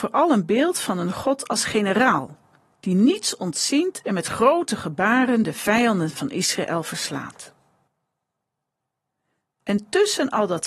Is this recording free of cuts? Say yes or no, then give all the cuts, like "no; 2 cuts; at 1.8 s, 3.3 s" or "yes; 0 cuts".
yes; 0 cuts